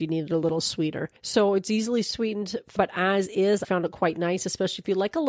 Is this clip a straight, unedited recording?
no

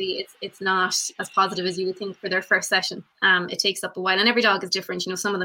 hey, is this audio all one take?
no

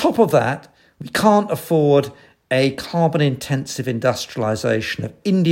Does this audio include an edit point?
no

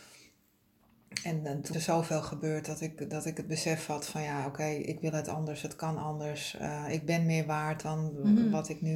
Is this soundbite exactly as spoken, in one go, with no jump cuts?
no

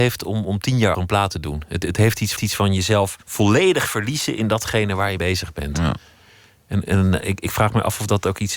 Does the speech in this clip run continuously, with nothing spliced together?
no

